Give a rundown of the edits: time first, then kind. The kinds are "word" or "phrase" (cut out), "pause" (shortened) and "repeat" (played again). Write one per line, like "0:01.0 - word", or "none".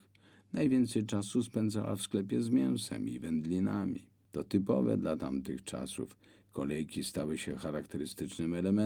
none